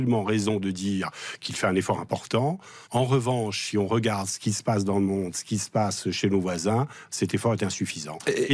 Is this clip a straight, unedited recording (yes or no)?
no